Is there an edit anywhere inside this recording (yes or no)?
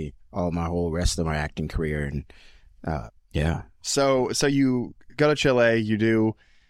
no